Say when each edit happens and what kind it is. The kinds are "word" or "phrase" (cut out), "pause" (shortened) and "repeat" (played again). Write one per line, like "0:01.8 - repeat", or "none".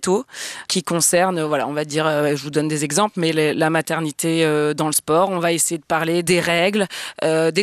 none